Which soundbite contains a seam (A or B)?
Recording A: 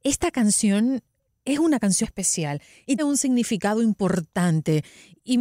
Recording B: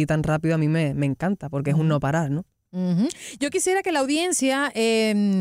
A